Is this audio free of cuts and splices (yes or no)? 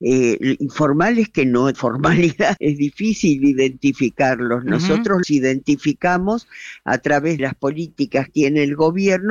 no